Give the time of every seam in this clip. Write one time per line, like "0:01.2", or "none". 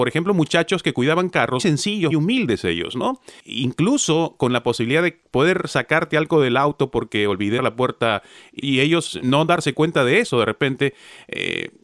0:01.6
0:02.1
0:07.6
0:08.6
0:09.2